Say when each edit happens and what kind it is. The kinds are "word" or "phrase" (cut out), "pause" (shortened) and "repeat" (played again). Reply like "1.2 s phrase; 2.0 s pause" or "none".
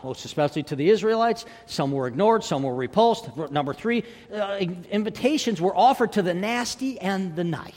none

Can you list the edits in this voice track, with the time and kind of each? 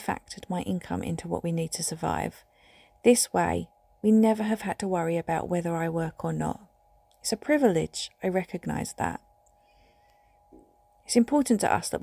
none

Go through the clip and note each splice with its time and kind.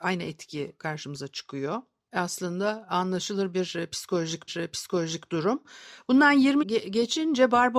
4.5 s repeat; 6.6 s word

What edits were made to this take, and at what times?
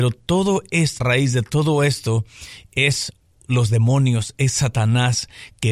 1.0 s word

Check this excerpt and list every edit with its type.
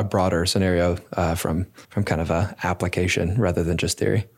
1.8 s pause

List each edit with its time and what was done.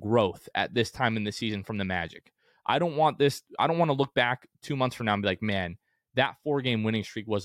none

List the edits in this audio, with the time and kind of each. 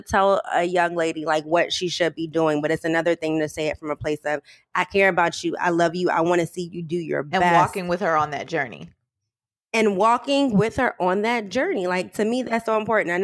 none

